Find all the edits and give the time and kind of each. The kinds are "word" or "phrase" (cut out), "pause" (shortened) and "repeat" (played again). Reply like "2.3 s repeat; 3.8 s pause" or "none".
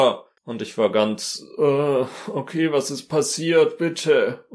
none